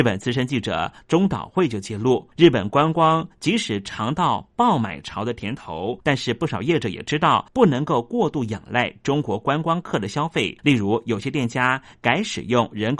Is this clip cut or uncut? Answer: cut